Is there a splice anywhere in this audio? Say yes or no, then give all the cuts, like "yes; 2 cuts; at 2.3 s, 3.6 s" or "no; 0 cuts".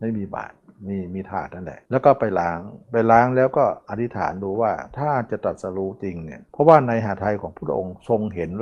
yes; 3 cuts; at 1.8 s, 2.8 s, 6.5 s